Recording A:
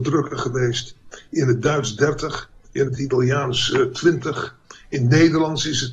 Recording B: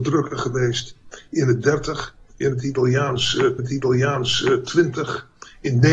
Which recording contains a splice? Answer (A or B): B